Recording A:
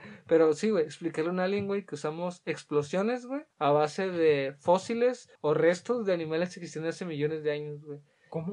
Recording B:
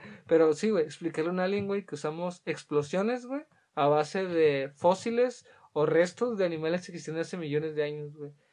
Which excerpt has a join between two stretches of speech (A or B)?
A